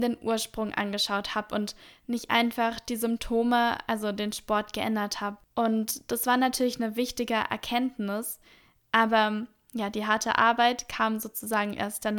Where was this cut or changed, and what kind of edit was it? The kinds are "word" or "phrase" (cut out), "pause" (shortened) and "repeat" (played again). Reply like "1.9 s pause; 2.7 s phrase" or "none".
none